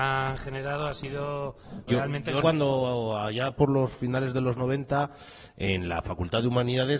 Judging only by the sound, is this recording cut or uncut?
cut